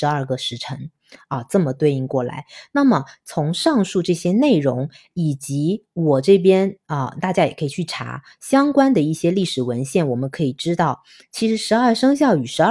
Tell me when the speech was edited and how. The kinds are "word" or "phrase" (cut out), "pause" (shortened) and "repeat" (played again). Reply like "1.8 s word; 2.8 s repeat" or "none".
none